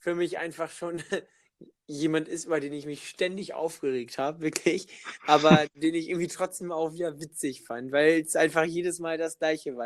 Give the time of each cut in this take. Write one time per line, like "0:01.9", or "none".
0:01.8